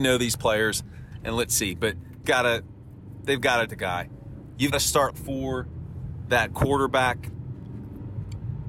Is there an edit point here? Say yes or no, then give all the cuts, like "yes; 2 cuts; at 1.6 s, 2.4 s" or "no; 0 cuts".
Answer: yes; 4 cuts; at 2.2 s, 3.7 s, 4.7 s, 5.1 s